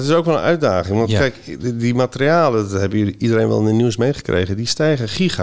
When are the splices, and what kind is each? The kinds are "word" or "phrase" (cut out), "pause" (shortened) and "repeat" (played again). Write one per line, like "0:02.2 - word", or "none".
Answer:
none